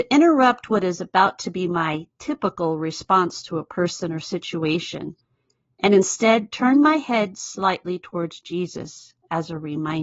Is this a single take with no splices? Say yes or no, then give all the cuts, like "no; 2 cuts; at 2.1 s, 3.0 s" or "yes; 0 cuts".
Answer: yes; 0 cuts